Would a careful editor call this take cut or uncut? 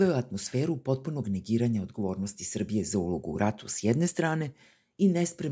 uncut